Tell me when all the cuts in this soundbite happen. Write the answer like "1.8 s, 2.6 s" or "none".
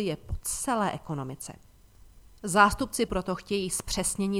3.1 s